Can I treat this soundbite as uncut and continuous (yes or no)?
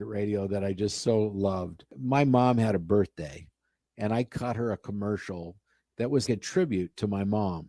no